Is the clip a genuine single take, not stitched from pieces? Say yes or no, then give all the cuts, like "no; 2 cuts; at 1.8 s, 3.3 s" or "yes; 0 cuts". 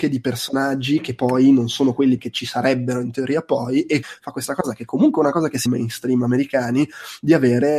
no; 3 cuts; at 2.2 s, 4.0 s, 5.7 s